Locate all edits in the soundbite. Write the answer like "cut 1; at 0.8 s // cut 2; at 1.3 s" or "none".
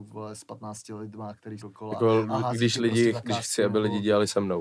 cut 1; at 1.6 s